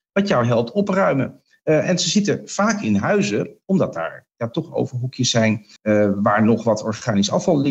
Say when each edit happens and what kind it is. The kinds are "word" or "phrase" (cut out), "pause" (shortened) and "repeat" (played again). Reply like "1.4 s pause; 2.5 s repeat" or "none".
5.8 s pause

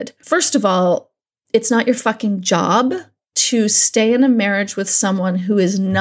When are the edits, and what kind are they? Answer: none

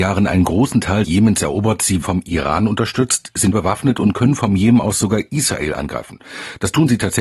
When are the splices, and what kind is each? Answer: 1.0 s word; 2.0 s word; 3.5 s word

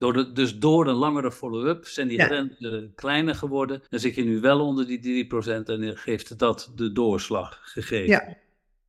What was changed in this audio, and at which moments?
3.9 s pause

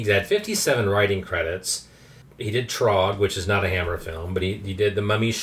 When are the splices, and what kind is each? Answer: none

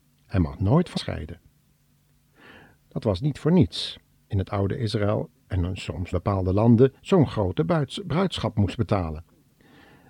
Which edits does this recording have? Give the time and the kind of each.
1.0 s word; 4.3 s phrase; 6.1 s phrase; 7.0 s pause

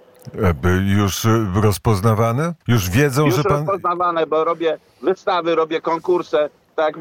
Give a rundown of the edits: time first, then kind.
2.6 s pause

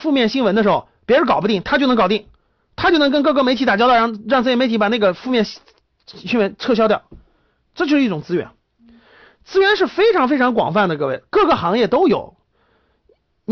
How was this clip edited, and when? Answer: none

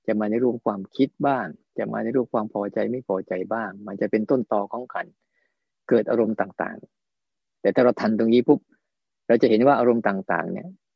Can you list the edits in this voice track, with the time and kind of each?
none

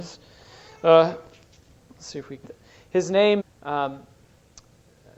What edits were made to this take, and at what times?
2.4 s word; 3.4 s word

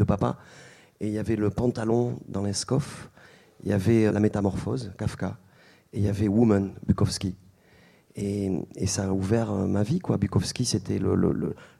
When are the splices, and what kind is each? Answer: 4.1 s word

